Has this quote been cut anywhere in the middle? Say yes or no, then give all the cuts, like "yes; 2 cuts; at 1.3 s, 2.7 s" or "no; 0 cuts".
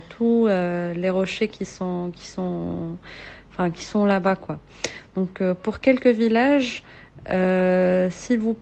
no; 0 cuts